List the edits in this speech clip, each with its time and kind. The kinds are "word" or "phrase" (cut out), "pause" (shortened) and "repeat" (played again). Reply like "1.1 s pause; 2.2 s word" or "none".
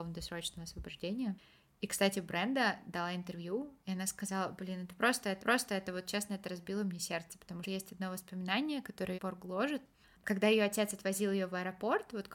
5.4 s repeat; 7.6 s phrase; 9.1 s phrase